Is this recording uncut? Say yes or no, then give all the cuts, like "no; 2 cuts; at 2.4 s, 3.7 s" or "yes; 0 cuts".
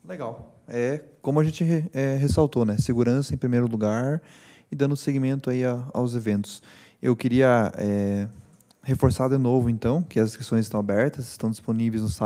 yes; 0 cuts